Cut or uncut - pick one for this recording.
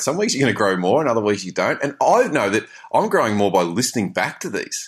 uncut